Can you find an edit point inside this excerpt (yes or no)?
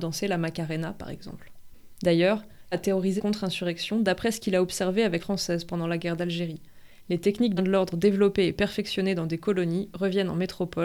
yes